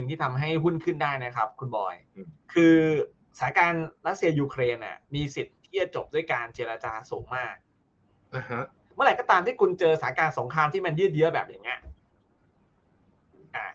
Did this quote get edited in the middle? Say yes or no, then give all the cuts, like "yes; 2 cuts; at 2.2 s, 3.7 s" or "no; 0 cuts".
yes; 3 cuts; at 2.4 s, 5.0 s, 8.8 s